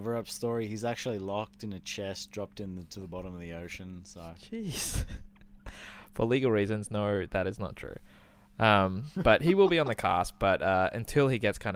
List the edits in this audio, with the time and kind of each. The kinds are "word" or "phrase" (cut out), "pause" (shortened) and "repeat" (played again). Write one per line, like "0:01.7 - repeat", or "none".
none